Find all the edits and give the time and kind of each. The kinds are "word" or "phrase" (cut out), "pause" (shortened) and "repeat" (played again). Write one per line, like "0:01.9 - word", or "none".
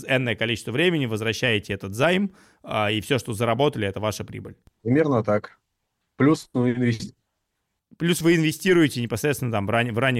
none